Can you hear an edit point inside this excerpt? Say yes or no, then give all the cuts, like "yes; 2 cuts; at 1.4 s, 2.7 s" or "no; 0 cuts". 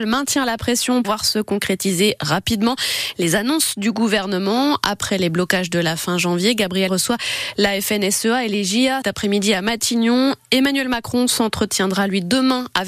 yes; 3 cuts; at 1.0 s, 6.9 s, 9.0 s